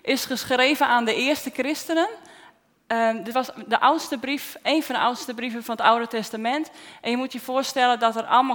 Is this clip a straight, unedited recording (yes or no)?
yes